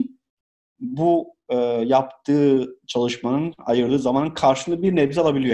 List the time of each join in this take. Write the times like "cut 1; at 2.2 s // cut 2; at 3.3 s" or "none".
cut 1; at 2.8 s